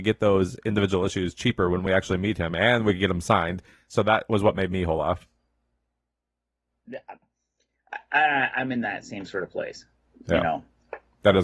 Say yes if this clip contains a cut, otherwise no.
no